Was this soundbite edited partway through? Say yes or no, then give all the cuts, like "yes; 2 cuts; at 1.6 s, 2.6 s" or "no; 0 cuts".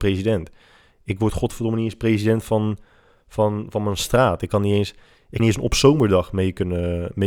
yes; 1 cut; at 5.4 s